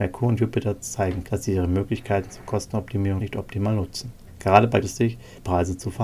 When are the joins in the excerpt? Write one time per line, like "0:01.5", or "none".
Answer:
0:01.2
0:03.2
0:04.8